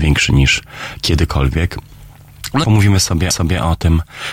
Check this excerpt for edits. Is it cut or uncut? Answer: cut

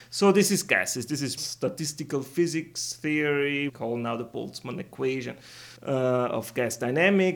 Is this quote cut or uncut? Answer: cut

